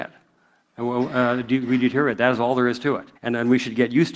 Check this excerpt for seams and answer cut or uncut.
cut